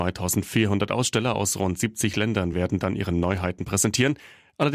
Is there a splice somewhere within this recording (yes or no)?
no